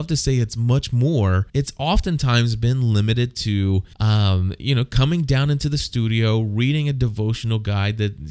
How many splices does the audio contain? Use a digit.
2